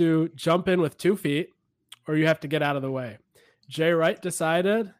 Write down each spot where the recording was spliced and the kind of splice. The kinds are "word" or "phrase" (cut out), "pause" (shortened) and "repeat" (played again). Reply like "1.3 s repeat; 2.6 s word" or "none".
none

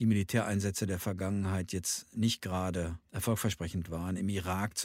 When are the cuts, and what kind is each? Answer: 3.0 s pause

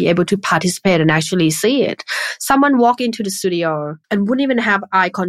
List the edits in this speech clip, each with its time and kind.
4.0 s pause

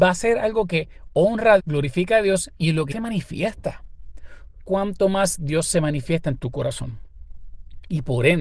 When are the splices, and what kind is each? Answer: 1.6 s word; 2.9 s word

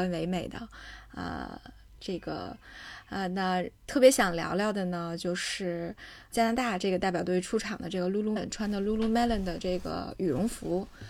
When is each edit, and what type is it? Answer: 3.8 s pause; 6.3 s word; 8.4 s word

